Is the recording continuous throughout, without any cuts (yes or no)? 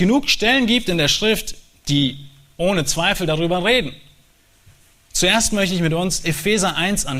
yes